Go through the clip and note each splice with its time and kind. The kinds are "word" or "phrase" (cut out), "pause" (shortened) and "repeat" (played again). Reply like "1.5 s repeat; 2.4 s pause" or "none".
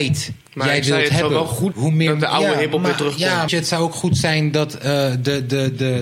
1.7 s word; 3.5 s phrase